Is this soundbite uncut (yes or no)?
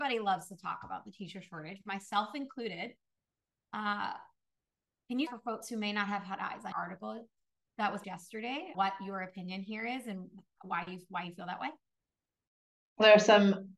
no